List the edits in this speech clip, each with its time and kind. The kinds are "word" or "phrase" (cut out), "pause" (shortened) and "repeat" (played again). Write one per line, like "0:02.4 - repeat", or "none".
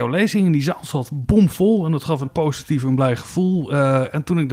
0:02.2 - word